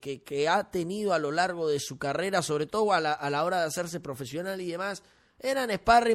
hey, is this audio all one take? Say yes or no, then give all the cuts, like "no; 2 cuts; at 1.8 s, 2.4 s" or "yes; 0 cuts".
yes; 0 cuts